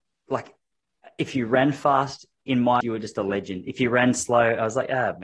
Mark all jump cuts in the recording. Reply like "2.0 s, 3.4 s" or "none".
2.8 s